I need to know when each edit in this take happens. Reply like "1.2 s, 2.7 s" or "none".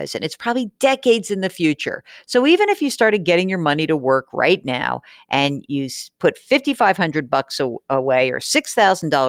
none